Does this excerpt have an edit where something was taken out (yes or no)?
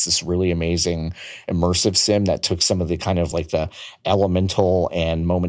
no